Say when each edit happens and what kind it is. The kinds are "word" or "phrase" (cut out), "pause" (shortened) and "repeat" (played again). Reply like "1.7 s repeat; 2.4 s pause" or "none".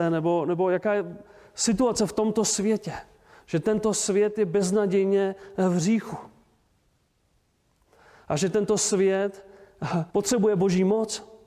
10.1 s pause